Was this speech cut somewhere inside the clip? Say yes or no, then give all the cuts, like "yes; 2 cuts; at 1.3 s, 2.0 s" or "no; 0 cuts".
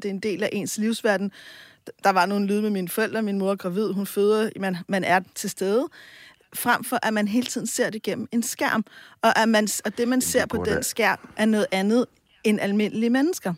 yes; 1 cut; at 4.9 s